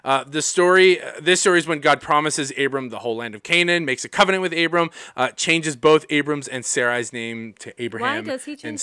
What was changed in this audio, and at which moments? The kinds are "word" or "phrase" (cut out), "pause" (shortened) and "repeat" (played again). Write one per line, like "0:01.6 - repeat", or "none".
none